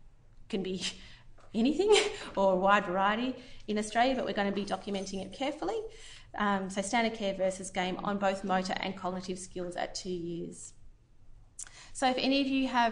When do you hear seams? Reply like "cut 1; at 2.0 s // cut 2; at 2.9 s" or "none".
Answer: cut 1; at 5.3 s